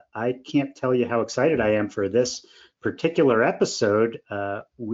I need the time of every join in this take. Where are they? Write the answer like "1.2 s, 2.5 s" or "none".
none